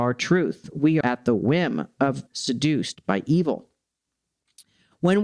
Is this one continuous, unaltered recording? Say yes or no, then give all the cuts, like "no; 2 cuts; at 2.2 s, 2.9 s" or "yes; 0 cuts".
no; 2 cuts; at 1.0 s, 2.3 s